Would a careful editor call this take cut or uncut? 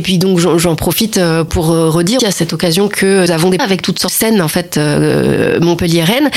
cut